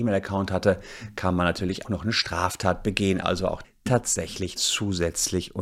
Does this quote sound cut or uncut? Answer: cut